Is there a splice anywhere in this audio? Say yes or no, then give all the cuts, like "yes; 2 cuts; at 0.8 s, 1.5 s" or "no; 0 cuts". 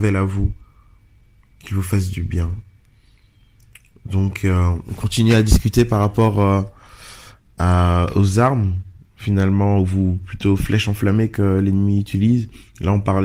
no; 0 cuts